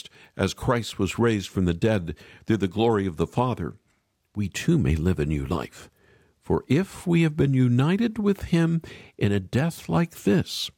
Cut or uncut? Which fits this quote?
uncut